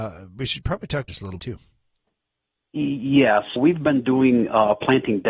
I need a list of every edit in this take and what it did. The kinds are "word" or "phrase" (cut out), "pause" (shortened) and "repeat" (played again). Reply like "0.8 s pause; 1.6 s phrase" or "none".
1.1 s word; 1.4 s word; 3.6 s word

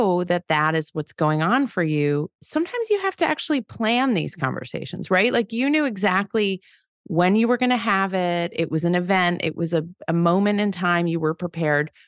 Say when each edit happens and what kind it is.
none

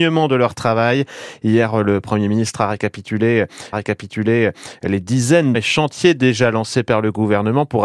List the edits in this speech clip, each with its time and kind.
3.7 s repeat; 5.5 s word

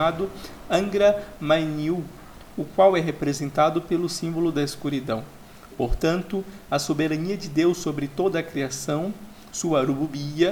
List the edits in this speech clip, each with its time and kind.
none

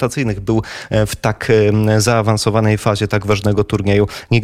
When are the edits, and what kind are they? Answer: none

